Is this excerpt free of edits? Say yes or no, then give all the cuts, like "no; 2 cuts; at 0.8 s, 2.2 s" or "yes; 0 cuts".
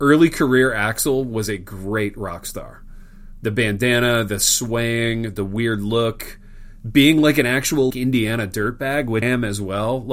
no; 2 cuts; at 7.9 s, 9.2 s